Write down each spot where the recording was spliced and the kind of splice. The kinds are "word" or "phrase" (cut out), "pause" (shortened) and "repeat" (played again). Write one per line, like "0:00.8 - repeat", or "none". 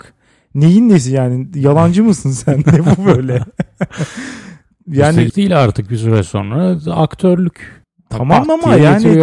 0:05.3 - word
0:07.8 - pause